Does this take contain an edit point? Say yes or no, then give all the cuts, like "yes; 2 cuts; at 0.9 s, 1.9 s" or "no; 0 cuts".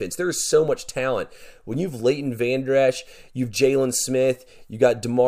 no; 0 cuts